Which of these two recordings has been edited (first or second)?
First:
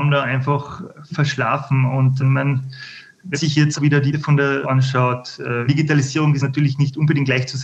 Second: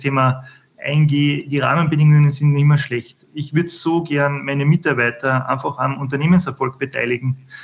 first